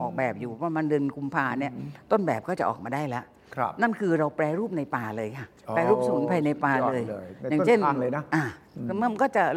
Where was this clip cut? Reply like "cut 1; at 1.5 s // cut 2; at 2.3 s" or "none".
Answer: cut 1; at 5.6 s